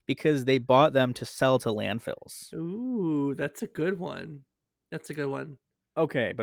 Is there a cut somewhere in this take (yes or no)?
no